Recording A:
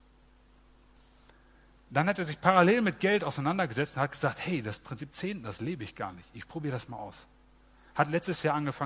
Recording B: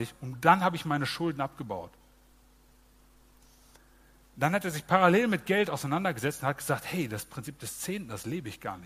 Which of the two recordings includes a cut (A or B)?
A